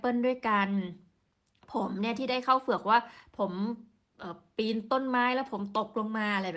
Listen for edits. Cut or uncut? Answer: uncut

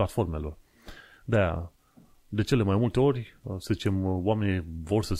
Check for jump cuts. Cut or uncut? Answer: uncut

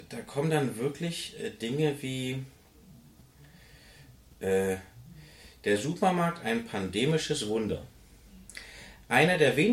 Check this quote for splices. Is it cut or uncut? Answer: uncut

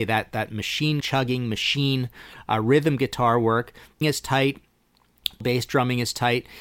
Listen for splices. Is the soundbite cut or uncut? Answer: cut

